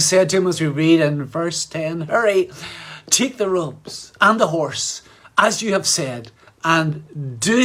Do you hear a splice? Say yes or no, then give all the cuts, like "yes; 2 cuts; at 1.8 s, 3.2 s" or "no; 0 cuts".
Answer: no; 0 cuts